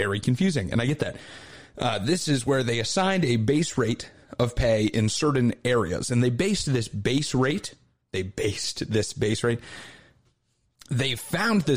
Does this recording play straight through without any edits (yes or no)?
yes